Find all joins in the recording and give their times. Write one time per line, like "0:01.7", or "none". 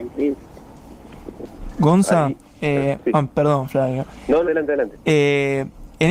0:04.4